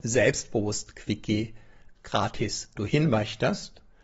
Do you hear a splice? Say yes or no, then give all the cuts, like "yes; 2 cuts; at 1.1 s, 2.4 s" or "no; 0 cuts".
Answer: yes; 1 cut; at 2.8 s